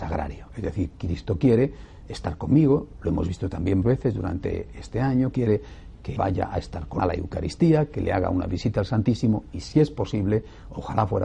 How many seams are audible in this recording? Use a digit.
4